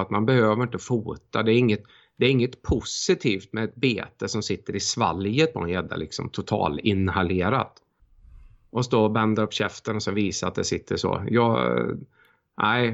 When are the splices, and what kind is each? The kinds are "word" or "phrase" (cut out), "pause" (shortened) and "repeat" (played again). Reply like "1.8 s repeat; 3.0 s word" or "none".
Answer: none